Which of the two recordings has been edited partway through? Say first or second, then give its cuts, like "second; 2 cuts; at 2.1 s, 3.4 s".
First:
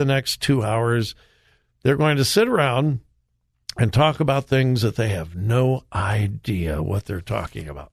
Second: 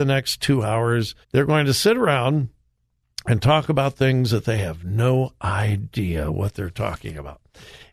second; 1 cut; at 1.2 s